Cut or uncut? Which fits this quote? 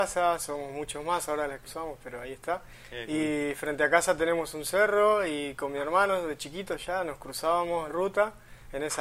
cut